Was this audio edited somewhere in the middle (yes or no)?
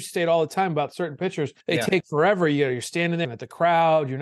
yes